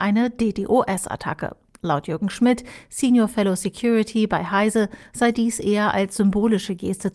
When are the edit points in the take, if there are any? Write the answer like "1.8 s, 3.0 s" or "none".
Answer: none